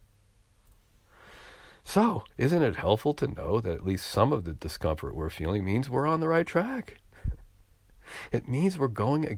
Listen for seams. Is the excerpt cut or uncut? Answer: uncut